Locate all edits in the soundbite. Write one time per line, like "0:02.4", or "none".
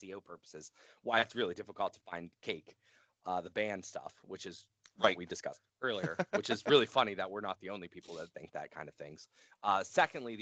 0:05.7